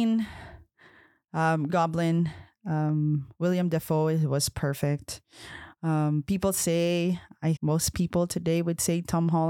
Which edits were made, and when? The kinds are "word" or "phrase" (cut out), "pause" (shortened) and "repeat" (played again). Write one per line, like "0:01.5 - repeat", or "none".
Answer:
0:01.7 - word
0:07.6 - word